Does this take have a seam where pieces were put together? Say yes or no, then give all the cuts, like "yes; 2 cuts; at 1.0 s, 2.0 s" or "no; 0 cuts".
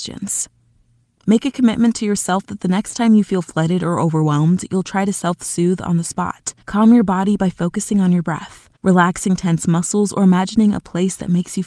yes; 2 cuts; at 6.6 s, 8.8 s